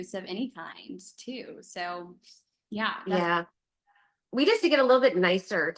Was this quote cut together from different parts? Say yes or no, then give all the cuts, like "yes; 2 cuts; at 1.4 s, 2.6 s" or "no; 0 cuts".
yes; 1 cut; at 4.6 s